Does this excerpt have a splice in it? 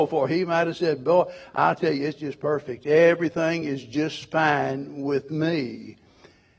no; 0 cuts

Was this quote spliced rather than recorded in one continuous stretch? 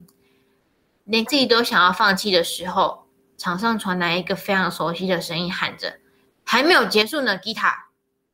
yes; 1 cut; at 1.3 s

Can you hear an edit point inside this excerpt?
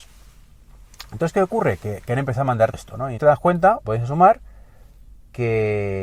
yes; 3 cuts; at 2.7 s, 3.2 s, 3.8 s

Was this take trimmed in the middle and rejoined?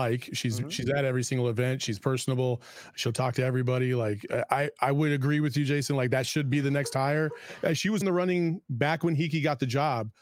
yes; 1 cut; at 8.0 s

